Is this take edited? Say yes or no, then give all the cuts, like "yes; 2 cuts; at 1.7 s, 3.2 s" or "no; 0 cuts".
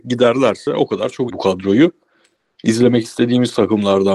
yes; 1 cut; at 1.3 s